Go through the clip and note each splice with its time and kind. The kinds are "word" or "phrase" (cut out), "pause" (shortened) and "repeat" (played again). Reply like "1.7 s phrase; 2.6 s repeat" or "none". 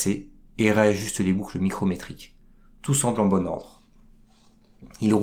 none